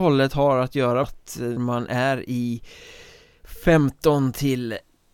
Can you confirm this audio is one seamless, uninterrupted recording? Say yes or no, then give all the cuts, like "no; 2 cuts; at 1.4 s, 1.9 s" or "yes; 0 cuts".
no; 2 cuts; at 1.0 s, 1.6 s